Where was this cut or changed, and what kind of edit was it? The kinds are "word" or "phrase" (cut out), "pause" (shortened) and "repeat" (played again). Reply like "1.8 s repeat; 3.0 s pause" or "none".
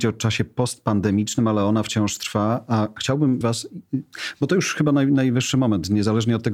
3.4 s word